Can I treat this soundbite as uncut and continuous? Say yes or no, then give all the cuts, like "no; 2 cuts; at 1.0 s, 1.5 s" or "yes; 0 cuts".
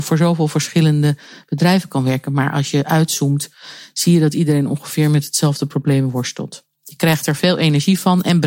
yes; 0 cuts